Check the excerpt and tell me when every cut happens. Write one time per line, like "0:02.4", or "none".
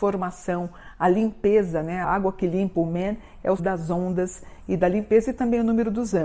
0:02.0
0:03.6